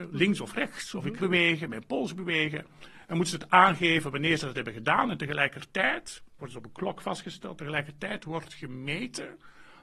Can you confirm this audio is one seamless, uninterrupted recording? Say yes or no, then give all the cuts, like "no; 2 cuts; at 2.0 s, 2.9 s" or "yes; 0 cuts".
no; 2 cuts; at 1.2 s, 6.4 s